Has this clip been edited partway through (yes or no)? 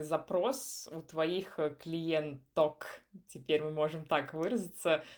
no